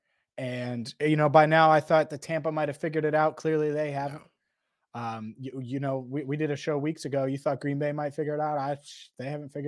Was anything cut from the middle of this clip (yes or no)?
no